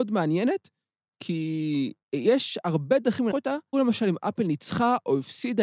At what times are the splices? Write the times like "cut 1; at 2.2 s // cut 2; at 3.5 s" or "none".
cut 1; at 2.0 s // cut 2; at 3.3 s // cut 3; at 3.7 s